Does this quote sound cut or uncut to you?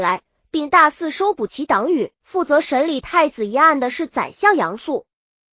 cut